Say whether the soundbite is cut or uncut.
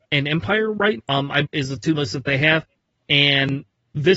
cut